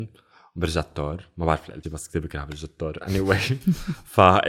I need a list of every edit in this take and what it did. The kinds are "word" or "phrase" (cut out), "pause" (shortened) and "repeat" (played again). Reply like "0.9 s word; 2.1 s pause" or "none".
1.8 s word